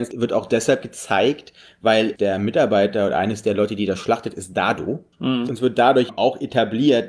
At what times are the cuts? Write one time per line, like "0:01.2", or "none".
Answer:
0:02.2
0:05.1
0:06.1